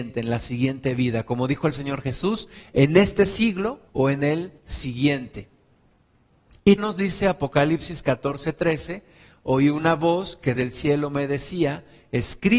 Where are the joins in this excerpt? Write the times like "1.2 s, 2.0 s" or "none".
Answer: 3.9 s, 4.6 s, 6.8 s, 10.6 s